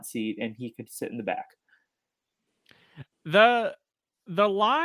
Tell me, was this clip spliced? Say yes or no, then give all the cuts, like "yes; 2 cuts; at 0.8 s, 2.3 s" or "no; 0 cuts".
no; 0 cuts